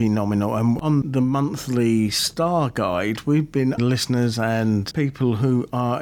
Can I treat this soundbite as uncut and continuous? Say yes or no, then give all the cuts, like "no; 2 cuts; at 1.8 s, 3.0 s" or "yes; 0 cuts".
no; 2 cuts; at 3.8 s, 4.9 s